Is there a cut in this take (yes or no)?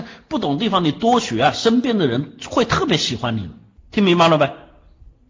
no